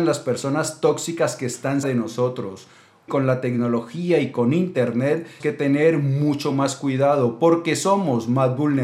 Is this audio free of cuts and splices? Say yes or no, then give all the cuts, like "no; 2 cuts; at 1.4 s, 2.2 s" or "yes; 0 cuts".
no; 3 cuts; at 1.8 s, 3.1 s, 5.4 s